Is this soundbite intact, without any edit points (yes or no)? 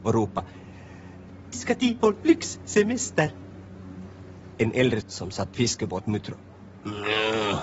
no